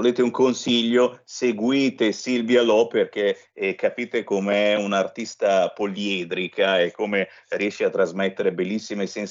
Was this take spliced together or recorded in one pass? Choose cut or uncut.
uncut